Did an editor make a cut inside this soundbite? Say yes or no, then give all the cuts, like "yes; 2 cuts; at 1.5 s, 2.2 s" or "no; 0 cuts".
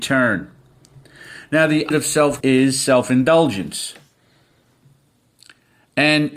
yes; 2 cuts; at 1.9 s, 2.4 s